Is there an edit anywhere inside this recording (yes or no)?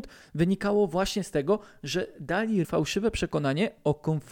yes